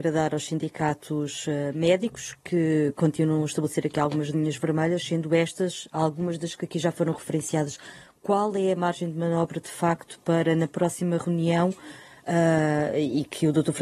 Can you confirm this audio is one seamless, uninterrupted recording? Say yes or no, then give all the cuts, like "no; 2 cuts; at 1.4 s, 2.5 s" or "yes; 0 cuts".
yes; 0 cuts